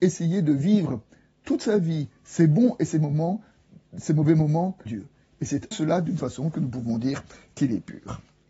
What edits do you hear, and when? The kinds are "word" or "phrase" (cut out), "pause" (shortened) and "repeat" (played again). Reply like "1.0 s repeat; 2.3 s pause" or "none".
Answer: 4.9 s word; 5.7 s word; 6.2 s word

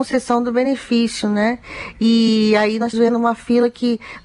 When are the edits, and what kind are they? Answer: 2.9 s word

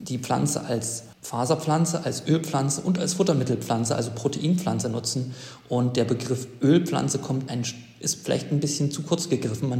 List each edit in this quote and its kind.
1.1 s pause; 7.5 s word

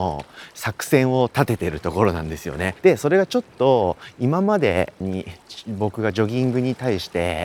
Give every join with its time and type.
2.8 s pause; 5.0 s phrase

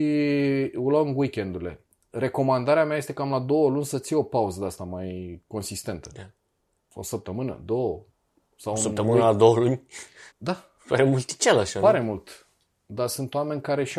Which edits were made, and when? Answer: 10.3 s pause

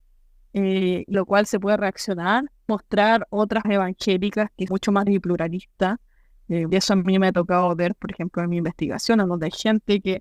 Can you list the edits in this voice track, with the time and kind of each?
1.1 s word; 2.7 s word; 3.6 s word; 4.7 s word; 5.1 s word; 6.7 s word

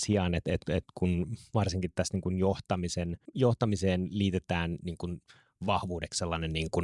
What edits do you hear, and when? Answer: none

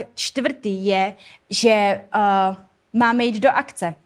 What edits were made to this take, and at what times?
none

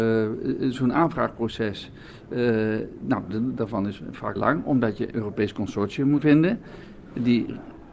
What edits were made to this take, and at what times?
3.6 s word; 4.4 s word; 5.1 s word; 6.2 s word

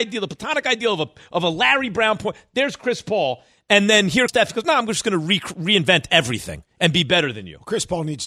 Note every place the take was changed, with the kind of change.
4.3 s word

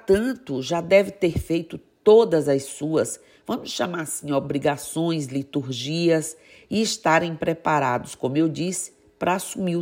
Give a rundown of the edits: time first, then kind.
none

